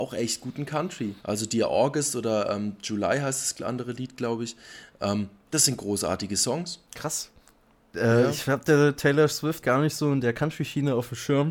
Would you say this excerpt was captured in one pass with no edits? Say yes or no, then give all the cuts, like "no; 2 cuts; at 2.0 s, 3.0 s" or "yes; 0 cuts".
no; 3 cuts; at 1.2 s, 6.9 s, 9.6 s